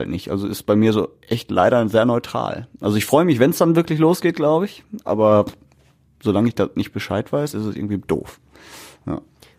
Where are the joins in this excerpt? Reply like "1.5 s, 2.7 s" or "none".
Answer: none

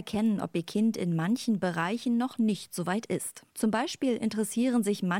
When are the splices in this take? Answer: 3.5 s

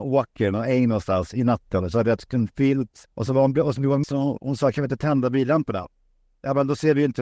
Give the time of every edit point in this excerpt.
3.1 s, 4.0 s

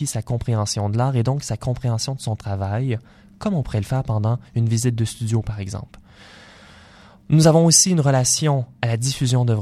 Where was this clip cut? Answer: none

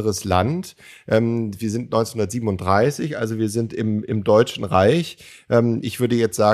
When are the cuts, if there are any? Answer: none

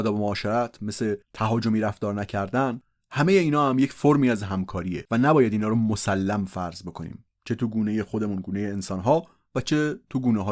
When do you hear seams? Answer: 1.2 s

